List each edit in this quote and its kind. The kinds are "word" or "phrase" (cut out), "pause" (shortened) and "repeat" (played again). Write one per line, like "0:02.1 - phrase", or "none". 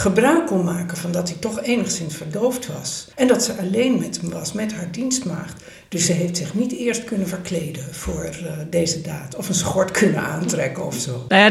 0:03.1 - pause